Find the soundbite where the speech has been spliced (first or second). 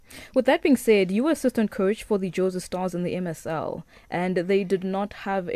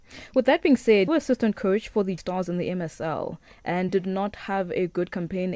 second